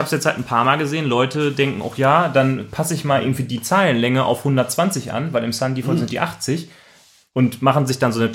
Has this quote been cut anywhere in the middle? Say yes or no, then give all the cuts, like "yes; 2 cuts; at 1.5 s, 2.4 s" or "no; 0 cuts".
no; 0 cuts